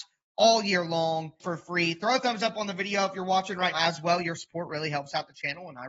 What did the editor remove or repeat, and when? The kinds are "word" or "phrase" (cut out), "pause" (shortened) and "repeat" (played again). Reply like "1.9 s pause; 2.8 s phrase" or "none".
1.4 s word; 3.7 s word